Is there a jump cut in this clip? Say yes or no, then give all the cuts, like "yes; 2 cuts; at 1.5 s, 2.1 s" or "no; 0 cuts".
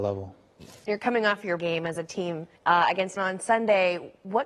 yes; 3 cuts; at 1.6 s, 2.6 s, 3.2 s